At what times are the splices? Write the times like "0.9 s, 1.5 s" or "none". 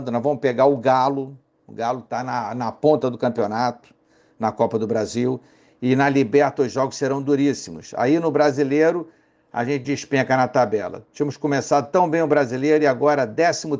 none